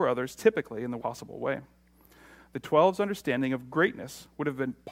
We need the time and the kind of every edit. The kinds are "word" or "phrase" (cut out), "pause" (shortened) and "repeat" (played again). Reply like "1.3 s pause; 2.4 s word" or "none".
1.0 s word